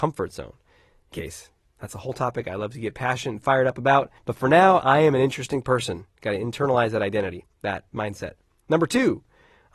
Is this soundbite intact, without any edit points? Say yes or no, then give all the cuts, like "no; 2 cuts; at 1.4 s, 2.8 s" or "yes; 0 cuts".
no; 2 cuts; at 1.1 s, 4.2 s